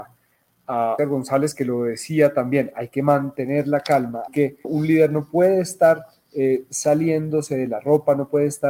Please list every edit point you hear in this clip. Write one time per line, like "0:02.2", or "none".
0:01.0
0:04.3
0:04.6